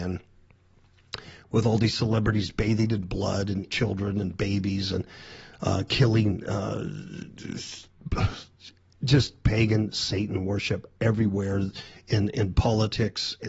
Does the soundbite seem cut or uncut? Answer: cut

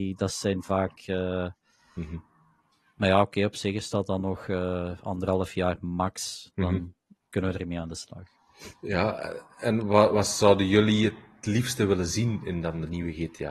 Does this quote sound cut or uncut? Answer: uncut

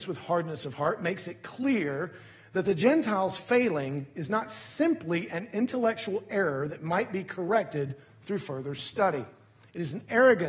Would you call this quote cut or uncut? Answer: uncut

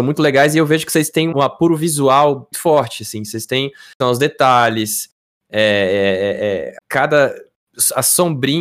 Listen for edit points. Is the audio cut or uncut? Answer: cut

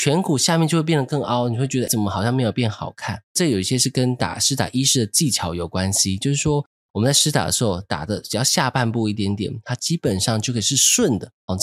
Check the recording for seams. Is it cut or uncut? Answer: cut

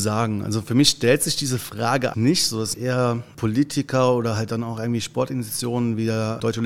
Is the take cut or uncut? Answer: cut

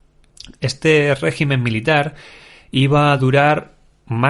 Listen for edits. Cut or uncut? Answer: uncut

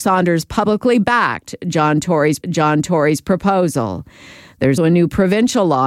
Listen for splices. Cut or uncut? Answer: cut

